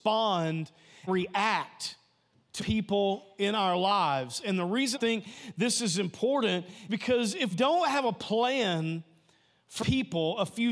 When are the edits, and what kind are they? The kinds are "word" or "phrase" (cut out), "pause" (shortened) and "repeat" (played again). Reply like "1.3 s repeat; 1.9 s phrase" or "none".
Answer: 1.1 s word; 2.6 s word; 4.9 s word; 6.9 s word; 7.5 s word; 9.8 s word